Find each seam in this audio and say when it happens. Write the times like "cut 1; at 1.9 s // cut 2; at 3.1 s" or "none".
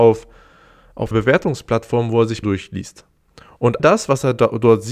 cut 1; at 1.1 s // cut 2; at 2.4 s // cut 3; at 3.8 s

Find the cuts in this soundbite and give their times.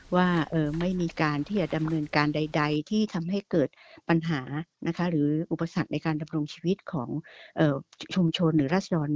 none

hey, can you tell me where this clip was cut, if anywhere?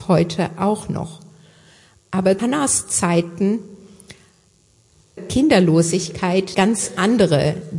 cut 1; at 2.4 s // cut 2; at 5.2 s // cut 3; at 6.5 s

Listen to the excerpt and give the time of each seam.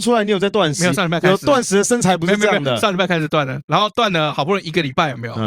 none

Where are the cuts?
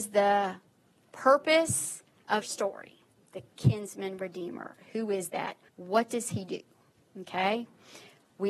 cut 1; at 2.4 s // cut 2; at 3.2 s // cut 3; at 5.7 s

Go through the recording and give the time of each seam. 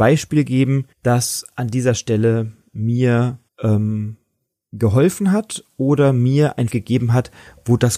cut 1; at 0.9 s // cut 2; at 3.5 s // cut 3; at 6.7 s

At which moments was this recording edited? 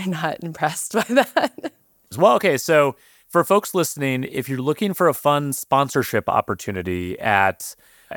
none

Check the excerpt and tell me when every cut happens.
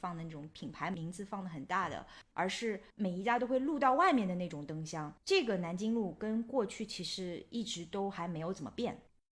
cut 1; at 2.9 s // cut 2; at 5.2 s

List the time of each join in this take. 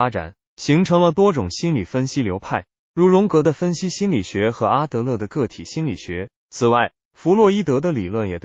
cut 1; at 6.4 s

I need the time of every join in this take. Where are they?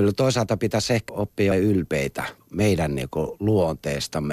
cut 1; at 1.1 s // cut 2; at 1.5 s // cut 3; at 2.4 s

